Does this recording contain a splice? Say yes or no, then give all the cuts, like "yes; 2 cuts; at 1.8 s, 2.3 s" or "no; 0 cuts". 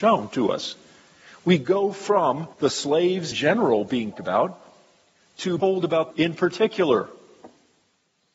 yes; 5 cuts; at 2.5 s, 3.3 s, 4.1 s, 5.6 s, 6.1 s